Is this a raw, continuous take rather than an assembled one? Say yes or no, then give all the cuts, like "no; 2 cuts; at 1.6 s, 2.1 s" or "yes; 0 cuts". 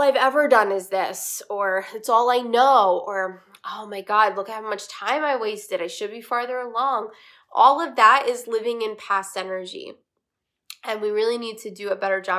yes; 0 cuts